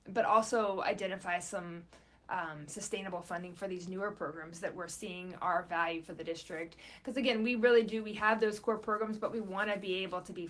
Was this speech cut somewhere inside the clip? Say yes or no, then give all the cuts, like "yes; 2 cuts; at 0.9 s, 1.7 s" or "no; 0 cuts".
no; 0 cuts